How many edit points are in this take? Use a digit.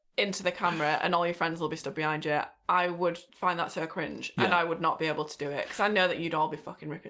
1